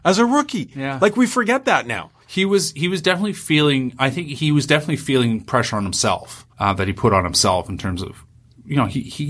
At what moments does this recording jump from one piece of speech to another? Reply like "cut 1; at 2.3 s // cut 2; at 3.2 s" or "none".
cut 1; at 2.2 s // cut 2; at 6.5 s